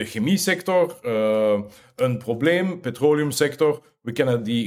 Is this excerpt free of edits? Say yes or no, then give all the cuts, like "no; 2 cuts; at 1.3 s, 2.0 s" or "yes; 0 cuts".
yes; 0 cuts